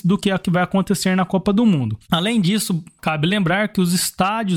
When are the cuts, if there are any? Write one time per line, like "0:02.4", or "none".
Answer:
0:02.0